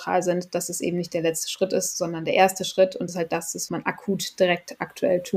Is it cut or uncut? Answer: cut